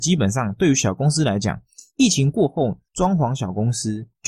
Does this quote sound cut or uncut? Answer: cut